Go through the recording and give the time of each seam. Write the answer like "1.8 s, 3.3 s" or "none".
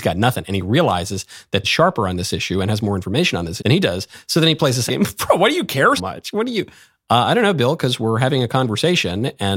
1.6 s, 3.6 s, 4.9 s, 6.0 s